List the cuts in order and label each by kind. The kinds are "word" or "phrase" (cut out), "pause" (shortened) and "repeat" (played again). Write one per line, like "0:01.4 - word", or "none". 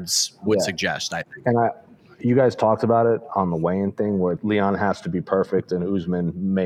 0:04.4 - word

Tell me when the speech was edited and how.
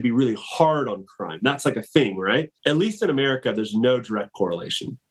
0:02.6 - pause

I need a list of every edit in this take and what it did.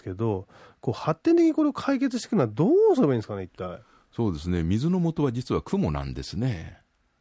none

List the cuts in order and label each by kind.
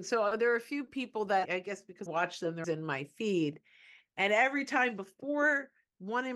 0:01.4 - word
0:02.1 - word
0:02.6 - word

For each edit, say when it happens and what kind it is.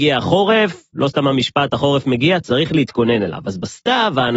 none

